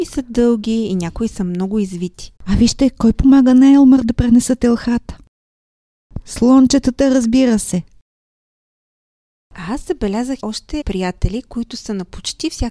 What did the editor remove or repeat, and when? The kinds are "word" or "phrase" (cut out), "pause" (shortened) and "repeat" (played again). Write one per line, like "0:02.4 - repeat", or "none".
0:02.4 - pause
0:10.4 - word
0:10.8 - word